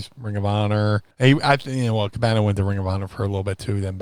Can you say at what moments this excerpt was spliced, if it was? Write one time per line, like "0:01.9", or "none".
0:01.1